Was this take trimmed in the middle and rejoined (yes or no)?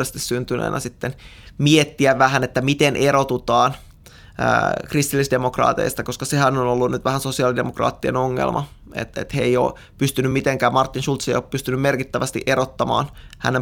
no